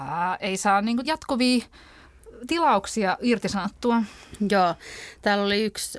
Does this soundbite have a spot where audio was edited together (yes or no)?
yes